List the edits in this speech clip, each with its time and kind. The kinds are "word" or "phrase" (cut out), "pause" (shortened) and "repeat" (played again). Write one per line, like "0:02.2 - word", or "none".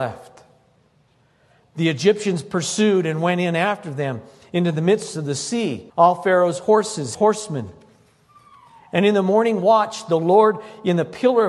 0:05.9 - pause
0:07.1 - phrase